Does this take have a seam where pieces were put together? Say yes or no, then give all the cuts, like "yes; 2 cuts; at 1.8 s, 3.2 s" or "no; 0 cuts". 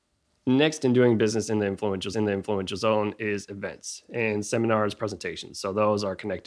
yes; 1 cut; at 2.1 s